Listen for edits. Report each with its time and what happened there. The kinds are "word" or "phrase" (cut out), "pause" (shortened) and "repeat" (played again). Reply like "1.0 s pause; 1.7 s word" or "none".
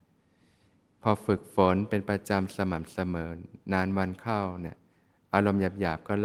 none